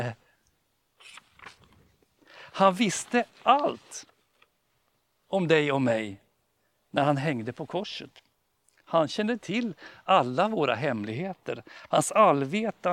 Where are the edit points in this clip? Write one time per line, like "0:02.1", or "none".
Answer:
none